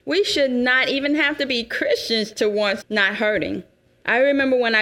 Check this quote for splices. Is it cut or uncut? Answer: cut